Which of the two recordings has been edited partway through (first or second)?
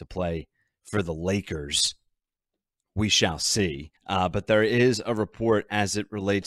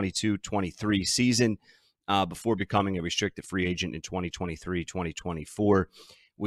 first